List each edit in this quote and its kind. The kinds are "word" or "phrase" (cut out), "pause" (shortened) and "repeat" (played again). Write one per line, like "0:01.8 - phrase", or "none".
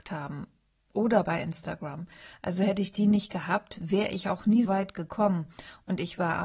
0:04.6 - phrase